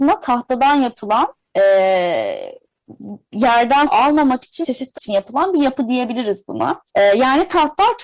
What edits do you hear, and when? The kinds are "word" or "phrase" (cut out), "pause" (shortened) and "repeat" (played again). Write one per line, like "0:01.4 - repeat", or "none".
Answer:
0:01.4 - pause
0:03.9 - word
0:04.6 - word
0:04.9 - phrase
0:06.9 - pause